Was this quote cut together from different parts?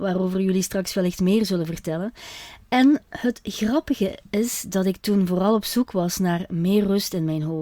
no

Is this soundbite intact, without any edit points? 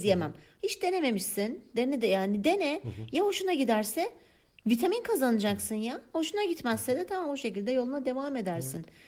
yes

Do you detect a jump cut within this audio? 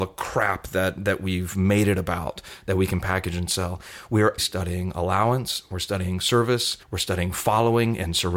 yes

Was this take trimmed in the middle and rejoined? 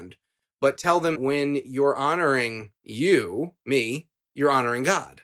yes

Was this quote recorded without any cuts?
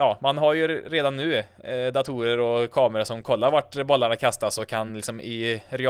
yes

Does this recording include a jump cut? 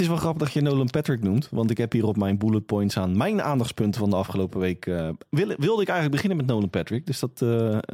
no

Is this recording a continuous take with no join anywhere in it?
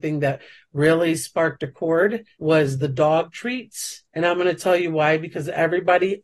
no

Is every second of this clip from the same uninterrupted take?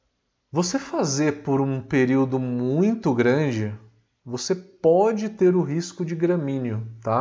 yes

